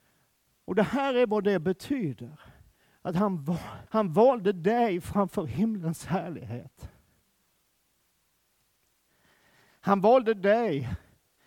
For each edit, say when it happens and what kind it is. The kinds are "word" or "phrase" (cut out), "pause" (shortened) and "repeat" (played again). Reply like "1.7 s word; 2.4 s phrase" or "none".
2.7 s pause; 3.9 s pause

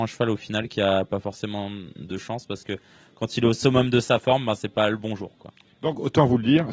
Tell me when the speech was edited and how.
none

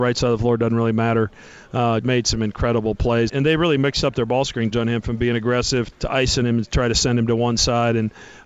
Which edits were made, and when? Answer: 2.0 s word; 3.3 s word; 4.7 s word; 5.9 s word

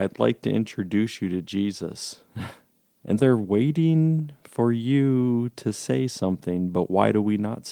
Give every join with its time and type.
3.2 s word

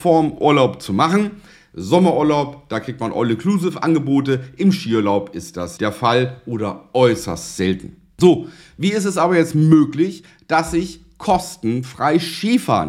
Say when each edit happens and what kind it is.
5.8 s word

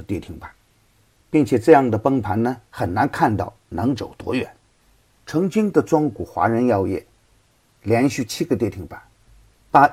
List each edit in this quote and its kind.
2.7 s pause

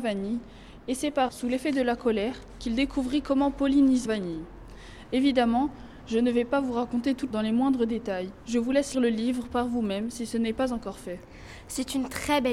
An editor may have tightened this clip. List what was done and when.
1.3 s word; 4.1 s word; 7.3 s word; 8.9 s word

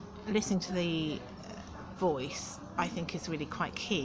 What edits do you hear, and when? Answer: 2.0 s word

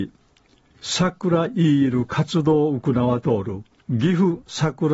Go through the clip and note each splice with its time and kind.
3.7 s pause

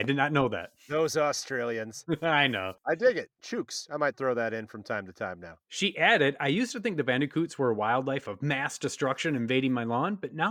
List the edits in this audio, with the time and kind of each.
5.6 s pause

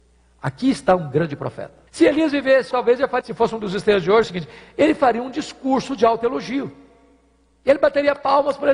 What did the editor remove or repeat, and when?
1.9 s pause; 2.7 s word; 3.2 s word; 4.2 s phrase

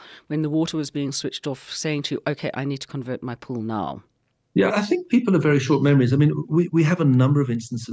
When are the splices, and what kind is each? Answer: 4.7 s word

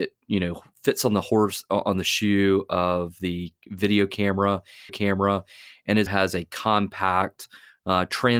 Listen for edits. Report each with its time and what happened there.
4.9 s repeat; 6.1 s word

